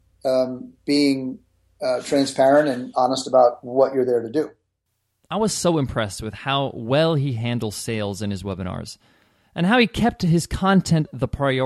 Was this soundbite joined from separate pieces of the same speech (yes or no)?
no